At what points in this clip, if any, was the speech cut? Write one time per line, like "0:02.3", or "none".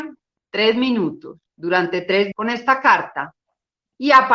0:01.5
0:02.3

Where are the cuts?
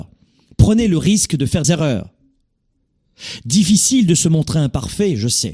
0:01.6

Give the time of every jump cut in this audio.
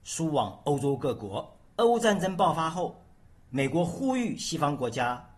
0:01.7

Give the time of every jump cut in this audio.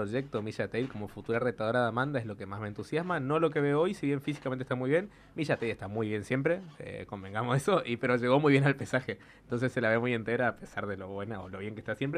none

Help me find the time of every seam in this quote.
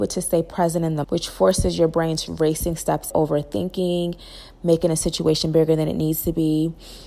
0:01.0
0:02.3
0:03.1

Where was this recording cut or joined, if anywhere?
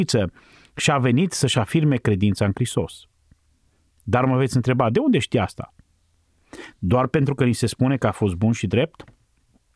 none

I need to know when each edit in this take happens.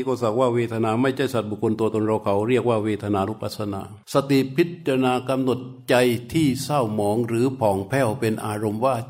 0:04.0

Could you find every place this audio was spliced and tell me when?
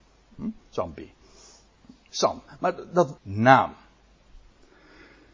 0:03.2

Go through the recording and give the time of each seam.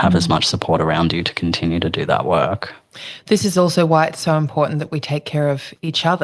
none

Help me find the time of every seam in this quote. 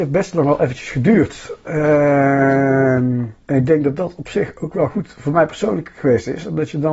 0:03.4

